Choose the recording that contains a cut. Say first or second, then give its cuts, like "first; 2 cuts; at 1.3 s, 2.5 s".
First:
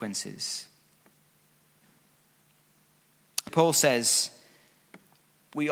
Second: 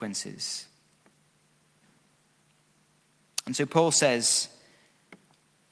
first; 1 cut; at 3.5 s